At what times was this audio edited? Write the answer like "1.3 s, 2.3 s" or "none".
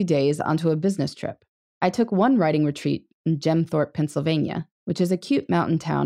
1.7 s, 4.8 s